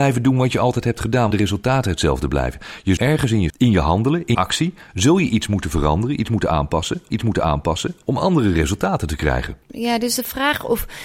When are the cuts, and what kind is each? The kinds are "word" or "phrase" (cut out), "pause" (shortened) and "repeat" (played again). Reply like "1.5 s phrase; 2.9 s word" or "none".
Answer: 1.3 s phrase; 3.0 s word; 3.5 s word; 4.3 s word; 7.1 s repeat; 9.6 s pause